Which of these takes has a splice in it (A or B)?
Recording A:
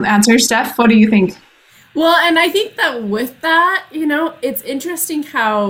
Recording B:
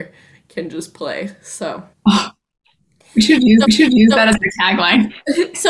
B